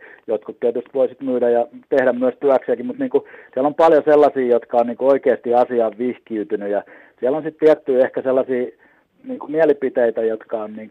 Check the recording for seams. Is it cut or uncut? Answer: uncut